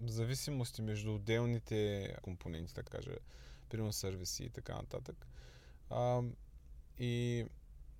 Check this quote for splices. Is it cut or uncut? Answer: cut